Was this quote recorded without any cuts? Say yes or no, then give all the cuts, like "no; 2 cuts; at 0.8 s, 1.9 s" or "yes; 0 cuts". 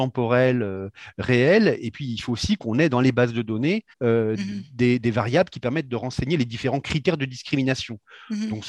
no; 1 cut; at 3.9 s